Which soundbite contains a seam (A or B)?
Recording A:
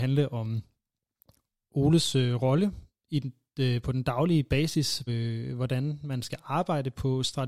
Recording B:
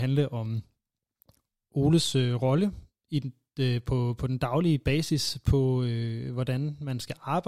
A